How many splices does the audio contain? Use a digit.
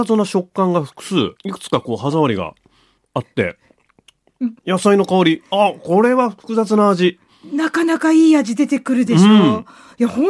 2